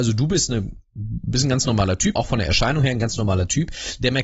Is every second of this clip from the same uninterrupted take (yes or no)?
no